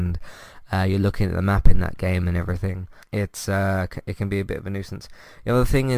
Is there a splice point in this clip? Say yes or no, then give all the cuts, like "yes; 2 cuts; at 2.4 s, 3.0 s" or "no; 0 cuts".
yes; 1 cut; at 3.0 s